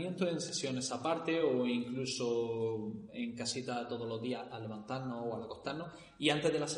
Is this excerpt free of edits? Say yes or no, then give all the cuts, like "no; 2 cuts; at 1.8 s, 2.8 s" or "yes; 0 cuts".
yes; 0 cuts